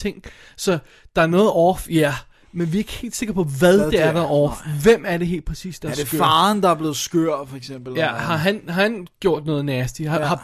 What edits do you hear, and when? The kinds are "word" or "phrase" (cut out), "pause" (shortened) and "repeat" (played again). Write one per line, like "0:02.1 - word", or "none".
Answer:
none